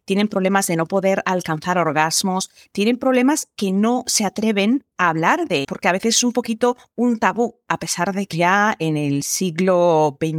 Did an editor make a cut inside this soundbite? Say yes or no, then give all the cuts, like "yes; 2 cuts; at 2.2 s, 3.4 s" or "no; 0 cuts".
yes; 3 cuts; at 4.9 s, 5.6 s, 8.3 s